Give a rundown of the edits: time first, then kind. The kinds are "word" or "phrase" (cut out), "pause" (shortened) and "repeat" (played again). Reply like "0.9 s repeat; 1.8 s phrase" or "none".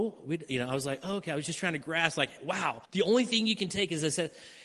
2.9 s pause